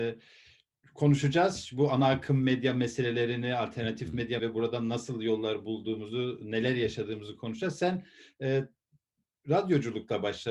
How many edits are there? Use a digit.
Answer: 1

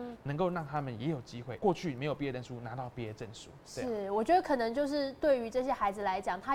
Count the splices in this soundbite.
2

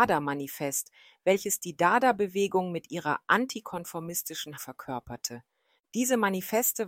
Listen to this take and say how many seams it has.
1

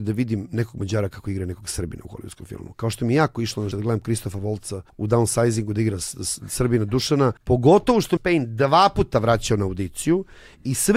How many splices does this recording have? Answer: 4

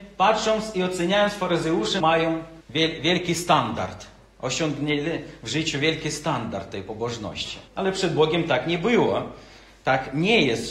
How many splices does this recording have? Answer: 3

